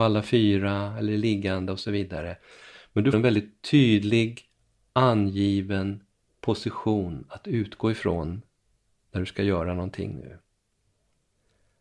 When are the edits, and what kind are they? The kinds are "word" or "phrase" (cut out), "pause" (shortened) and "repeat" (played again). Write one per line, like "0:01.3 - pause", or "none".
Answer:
0:03.1 - word